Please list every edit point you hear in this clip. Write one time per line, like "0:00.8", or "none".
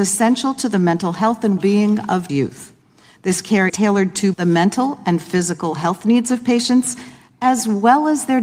0:01.6
0:02.3
0:03.7
0:04.3